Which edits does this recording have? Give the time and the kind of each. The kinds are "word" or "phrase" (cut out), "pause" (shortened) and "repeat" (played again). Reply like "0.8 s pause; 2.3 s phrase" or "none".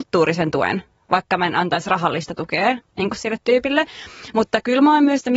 none